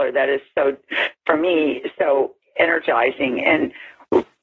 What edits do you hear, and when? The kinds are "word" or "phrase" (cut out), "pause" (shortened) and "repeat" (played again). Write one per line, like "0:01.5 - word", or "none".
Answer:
none